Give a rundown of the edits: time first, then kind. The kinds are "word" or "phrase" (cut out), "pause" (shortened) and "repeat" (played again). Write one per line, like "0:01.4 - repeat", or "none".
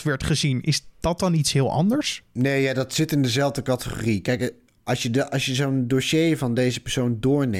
none